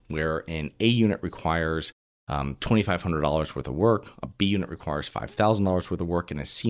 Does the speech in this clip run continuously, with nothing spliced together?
yes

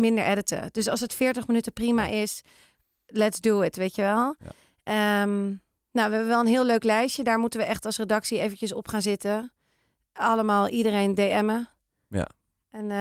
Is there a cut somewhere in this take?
no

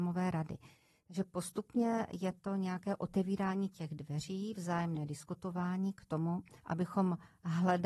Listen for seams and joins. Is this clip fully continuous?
no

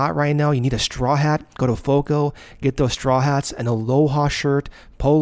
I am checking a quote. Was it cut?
no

